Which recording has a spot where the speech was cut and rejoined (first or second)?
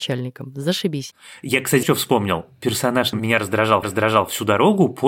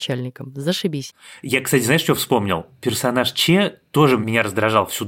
first